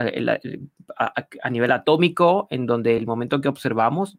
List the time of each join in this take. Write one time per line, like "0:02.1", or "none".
none